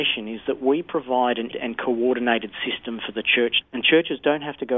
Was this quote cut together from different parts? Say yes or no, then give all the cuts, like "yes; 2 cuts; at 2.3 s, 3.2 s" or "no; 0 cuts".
yes; 2 cuts; at 1.5 s, 3.6 s